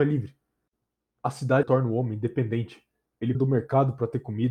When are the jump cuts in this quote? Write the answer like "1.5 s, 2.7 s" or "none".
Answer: 1.6 s, 3.3 s

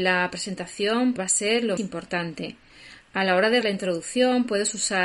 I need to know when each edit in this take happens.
1.2 s, 1.8 s, 3.6 s

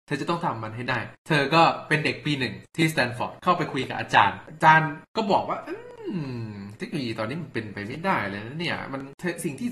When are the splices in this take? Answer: 1.2 s

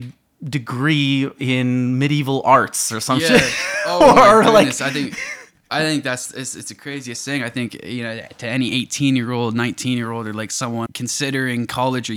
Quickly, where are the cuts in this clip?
10.9 s

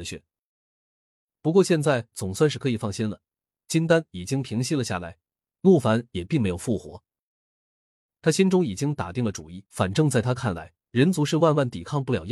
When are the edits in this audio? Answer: 9.7 s, 10.8 s

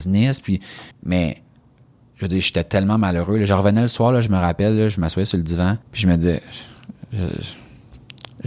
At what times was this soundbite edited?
0.9 s, 5.8 s

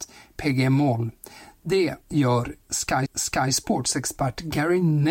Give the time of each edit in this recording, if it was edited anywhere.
2.0 s, 3.1 s

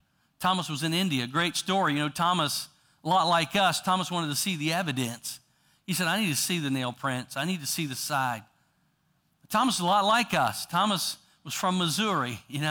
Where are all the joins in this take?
none

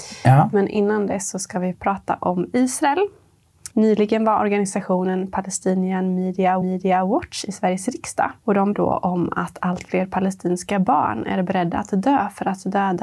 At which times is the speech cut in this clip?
3.7 s, 6.6 s, 8.4 s, 8.7 s

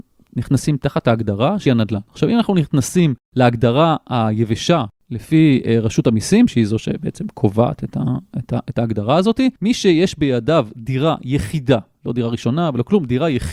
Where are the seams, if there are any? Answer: 1.7 s, 9.6 s

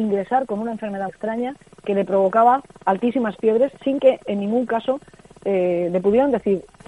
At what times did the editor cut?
1.1 s, 2.7 s, 3.7 s

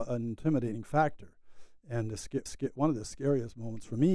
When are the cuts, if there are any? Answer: 2.5 s

